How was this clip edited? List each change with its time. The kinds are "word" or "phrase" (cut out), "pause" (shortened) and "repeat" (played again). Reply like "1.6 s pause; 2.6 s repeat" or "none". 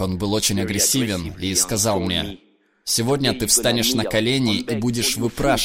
none